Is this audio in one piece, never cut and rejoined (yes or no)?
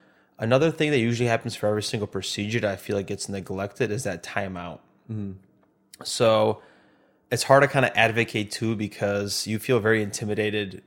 yes